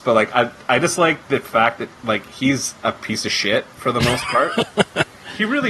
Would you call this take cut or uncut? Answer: uncut